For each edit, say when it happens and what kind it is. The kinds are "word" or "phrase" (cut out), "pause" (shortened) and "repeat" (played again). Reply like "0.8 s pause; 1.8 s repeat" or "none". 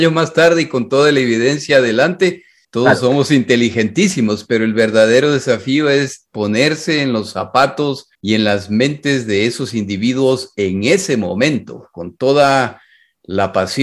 2.6 s pause; 8.1 s pause